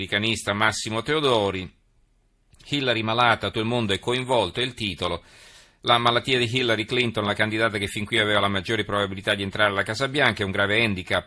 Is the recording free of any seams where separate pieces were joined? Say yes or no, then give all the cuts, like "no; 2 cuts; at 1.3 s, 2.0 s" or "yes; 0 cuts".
no; 1 cut; at 3.5 s